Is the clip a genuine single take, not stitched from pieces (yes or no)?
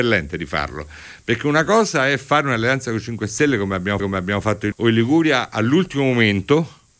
no